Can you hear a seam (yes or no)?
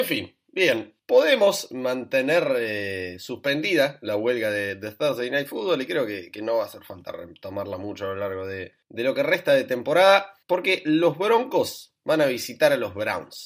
yes